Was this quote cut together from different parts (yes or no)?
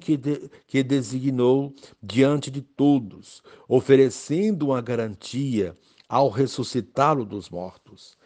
no